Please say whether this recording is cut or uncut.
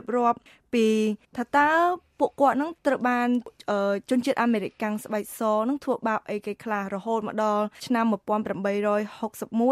cut